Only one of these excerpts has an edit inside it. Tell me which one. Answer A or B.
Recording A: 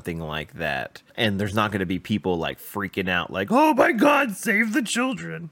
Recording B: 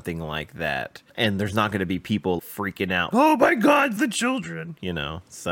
B